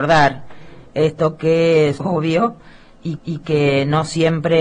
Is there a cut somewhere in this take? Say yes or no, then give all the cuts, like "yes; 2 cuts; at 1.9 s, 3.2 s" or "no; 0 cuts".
yes; 2 cuts; at 2.0 s, 3.2 s